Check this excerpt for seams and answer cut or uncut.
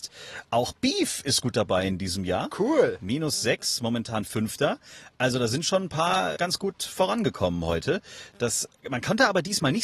cut